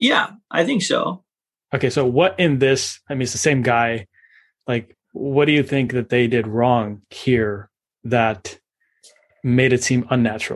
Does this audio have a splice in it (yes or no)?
no